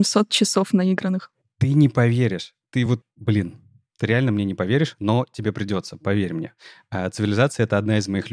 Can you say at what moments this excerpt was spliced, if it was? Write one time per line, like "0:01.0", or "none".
none